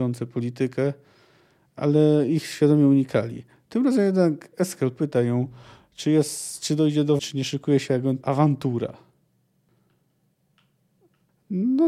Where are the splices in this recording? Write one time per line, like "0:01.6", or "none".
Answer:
0:07.2
0:07.9
0:08.2